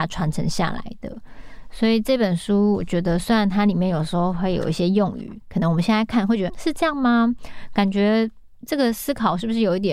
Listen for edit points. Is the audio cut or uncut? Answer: cut